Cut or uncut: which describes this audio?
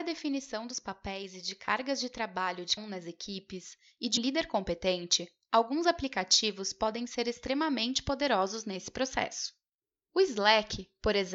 cut